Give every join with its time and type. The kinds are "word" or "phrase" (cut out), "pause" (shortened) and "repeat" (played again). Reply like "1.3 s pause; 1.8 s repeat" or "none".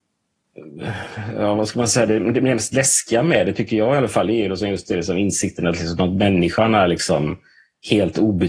none